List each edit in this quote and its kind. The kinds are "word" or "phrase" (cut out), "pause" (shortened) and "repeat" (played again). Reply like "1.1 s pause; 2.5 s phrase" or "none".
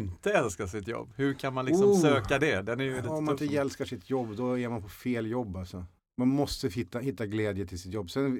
6.0 s pause